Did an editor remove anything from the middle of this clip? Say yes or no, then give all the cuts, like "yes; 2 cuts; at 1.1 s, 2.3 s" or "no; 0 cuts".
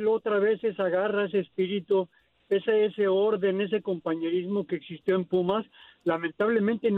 no; 0 cuts